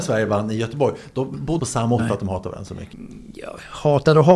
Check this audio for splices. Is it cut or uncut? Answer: cut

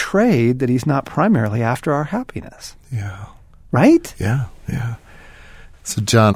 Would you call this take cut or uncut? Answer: uncut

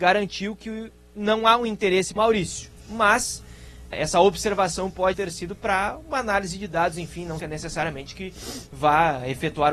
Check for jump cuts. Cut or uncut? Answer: cut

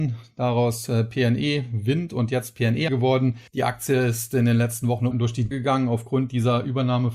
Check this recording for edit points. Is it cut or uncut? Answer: cut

